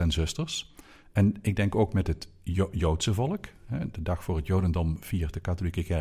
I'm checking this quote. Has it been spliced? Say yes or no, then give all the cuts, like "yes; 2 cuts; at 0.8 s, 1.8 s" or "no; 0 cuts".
no; 0 cuts